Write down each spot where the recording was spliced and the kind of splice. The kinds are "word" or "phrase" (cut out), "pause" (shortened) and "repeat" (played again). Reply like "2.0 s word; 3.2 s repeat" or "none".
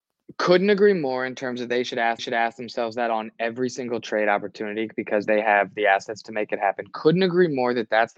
2.2 s repeat